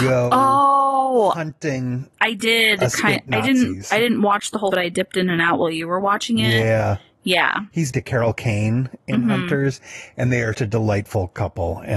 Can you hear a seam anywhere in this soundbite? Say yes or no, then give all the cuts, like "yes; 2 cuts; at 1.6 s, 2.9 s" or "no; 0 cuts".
yes; 4 cuts; at 2.1 s, 4.7 s, 7.9 s, 10.5 s